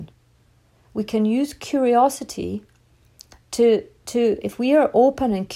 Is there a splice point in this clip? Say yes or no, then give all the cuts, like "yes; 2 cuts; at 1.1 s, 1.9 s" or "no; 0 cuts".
no; 0 cuts